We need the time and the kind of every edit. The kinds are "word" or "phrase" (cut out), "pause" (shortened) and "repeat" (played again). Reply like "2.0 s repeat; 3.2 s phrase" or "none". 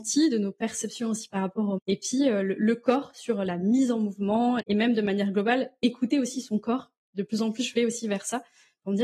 1.8 s word; 4.6 s word